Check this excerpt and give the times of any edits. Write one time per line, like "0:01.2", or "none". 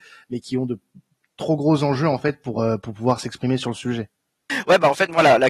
none